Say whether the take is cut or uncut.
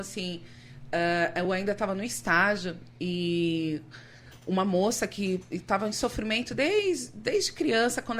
uncut